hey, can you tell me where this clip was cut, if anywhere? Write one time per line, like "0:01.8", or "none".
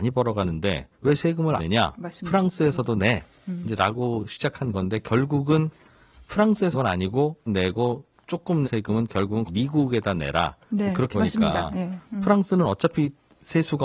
0:00.9
0:01.6
0:06.7
0:07.5
0:08.6
0:09.5
0:11.1

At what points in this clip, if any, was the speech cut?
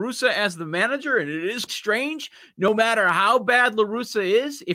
0:01.7

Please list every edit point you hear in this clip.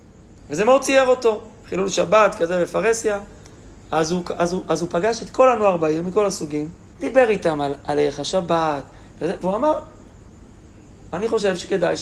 0:06.9

